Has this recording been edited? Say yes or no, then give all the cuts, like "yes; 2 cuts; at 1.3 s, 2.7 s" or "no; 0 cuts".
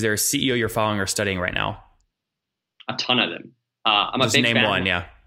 no; 0 cuts